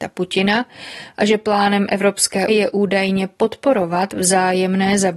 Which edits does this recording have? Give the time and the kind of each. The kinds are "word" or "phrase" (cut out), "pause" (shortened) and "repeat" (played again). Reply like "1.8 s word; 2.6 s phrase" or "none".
2.5 s word